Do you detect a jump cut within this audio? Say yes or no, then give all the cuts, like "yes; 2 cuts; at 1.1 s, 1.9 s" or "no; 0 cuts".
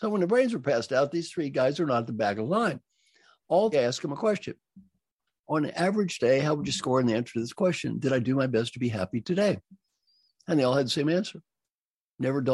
yes; 1 cut; at 3.7 s